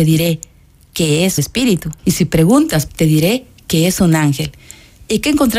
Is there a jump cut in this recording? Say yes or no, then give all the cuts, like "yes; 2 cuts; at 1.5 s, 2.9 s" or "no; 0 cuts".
yes; 3 cuts; at 1.4 s, 2.0 s, 2.9 s